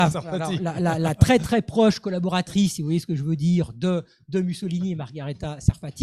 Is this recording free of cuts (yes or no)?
yes